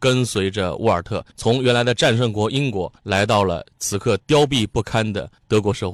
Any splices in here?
yes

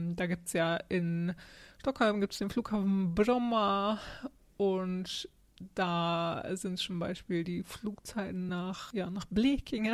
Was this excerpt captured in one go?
yes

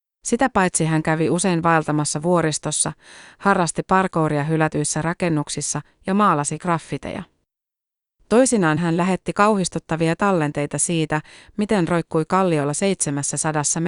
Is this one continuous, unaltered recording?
yes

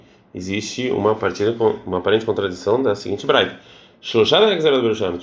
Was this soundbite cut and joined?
no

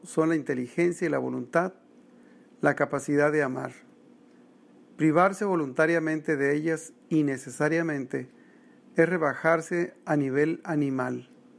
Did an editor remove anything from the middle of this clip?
no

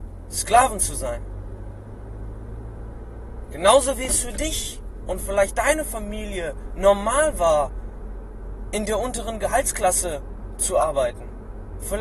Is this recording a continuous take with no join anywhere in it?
yes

